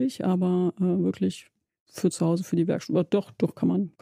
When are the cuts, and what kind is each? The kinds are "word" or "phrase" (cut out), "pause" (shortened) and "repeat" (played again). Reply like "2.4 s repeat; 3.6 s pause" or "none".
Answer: none